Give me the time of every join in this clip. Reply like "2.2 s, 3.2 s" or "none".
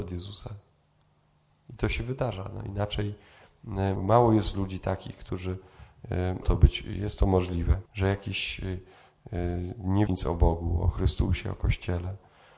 4.0 s, 6.4 s, 7.9 s, 10.1 s